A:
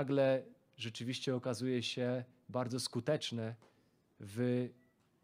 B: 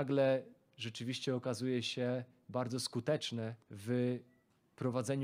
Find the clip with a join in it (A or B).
B